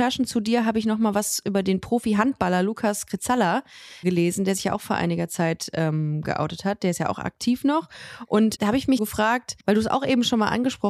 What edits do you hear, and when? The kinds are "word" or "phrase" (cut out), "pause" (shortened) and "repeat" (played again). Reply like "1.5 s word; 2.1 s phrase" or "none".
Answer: 4.0 s word; 8.6 s word; 9.0 s word; 9.6 s pause